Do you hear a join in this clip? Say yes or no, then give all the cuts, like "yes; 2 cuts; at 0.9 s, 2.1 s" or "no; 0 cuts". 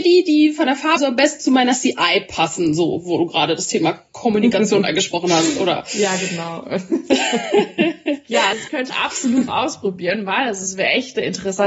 yes; 4 cuts; at 1.0 s, 8.5 s, 8.9 s, 9.5 s